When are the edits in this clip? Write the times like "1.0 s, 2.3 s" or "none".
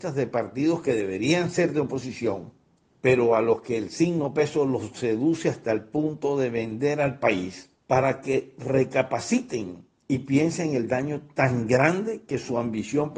2.8 s, 7.8 s, 10.0 s